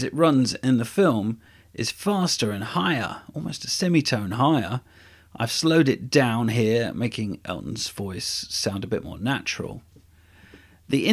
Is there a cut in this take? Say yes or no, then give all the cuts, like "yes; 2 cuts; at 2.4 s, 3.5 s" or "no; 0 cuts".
no; 0 cuts